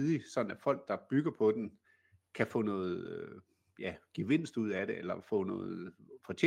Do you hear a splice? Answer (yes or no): no